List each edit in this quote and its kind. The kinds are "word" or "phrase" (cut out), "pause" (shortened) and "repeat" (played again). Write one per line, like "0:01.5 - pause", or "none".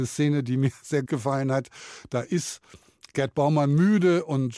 0:01.1 - word